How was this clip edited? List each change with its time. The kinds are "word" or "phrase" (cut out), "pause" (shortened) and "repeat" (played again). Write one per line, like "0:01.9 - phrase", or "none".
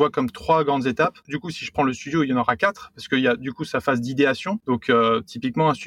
none

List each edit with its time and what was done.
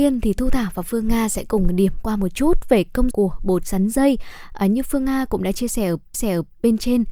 0:03.1 - word
0:06.1 - repeat

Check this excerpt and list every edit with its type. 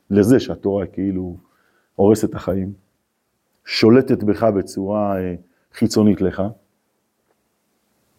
none

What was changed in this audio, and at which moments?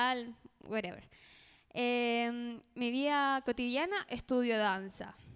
none

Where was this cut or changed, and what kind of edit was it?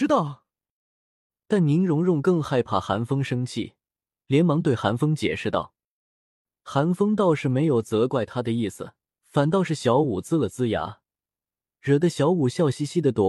0:09.1 - pause

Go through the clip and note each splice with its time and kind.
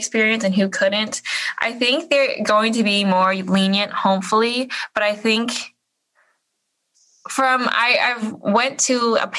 none

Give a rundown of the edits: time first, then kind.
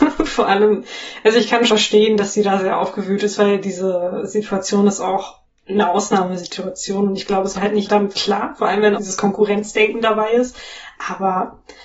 0:01.7 - word
0:05.4 - pause
0:07.5 - word
0:07.9 - word
0:09.0 - word

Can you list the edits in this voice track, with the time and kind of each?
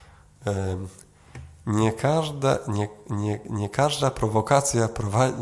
none

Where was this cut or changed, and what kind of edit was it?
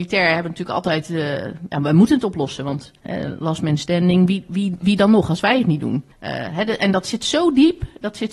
0:03.0 - pause
0:06.1 - pause

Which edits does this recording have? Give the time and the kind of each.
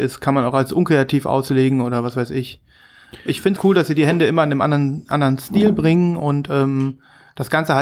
0:03.6 - word

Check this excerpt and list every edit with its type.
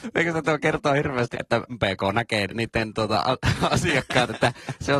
0:01.3 - word
0:01.7 - phrase
0:02.5 - word

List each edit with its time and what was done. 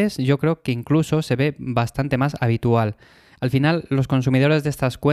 none

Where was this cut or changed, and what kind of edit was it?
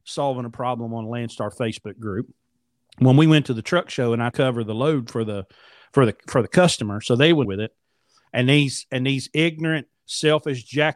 0:04.3 - phrase
0:07.4 - phrase

